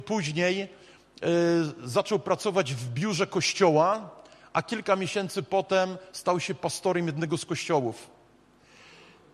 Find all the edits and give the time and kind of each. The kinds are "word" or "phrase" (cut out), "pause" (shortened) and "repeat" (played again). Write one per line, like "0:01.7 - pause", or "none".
none